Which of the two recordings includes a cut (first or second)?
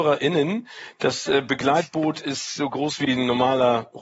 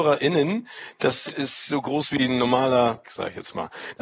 second